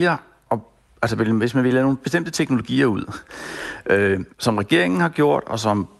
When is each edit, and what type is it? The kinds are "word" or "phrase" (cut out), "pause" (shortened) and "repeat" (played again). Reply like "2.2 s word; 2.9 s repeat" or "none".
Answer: 4.3 s pause